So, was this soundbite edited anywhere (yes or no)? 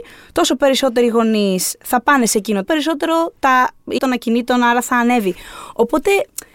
yes